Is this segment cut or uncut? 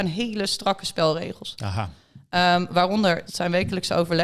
cut